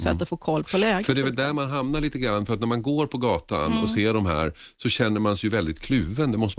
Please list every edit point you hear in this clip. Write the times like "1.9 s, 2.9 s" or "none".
none